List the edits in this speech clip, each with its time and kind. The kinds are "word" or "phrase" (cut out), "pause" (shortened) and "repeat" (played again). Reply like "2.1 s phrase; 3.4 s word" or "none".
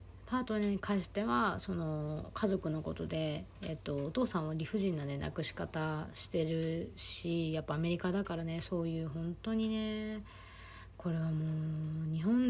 none